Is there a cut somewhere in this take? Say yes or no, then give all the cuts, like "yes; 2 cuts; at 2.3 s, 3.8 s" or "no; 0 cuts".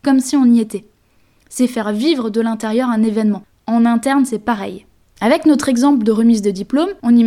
yes; 1 cut; at 5.0 s